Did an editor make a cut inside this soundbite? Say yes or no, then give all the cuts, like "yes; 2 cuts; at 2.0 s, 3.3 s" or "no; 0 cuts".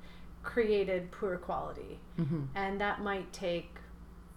no; 0 cuts